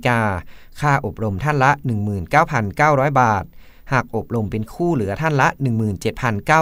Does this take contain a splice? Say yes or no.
no